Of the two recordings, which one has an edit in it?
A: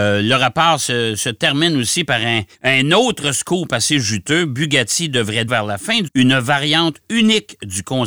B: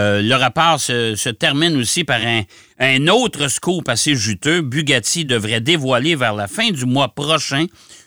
A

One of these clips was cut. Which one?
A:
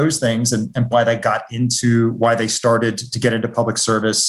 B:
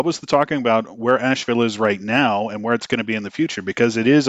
A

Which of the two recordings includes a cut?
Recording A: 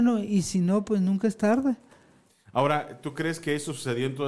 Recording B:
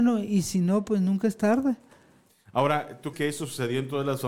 B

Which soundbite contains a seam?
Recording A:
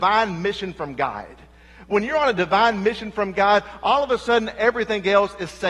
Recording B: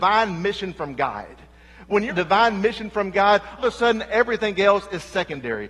B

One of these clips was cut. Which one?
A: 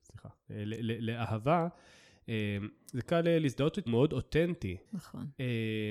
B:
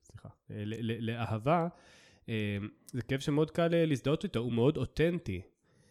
A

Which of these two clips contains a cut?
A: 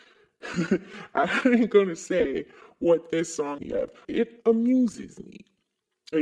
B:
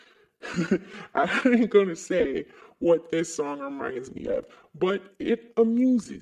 A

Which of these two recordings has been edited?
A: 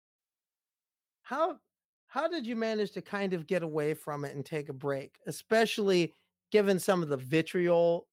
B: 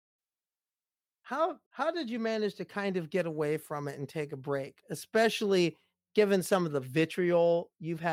B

